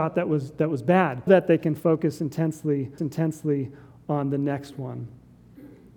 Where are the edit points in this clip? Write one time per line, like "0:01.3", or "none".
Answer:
0:01.3
0:03.0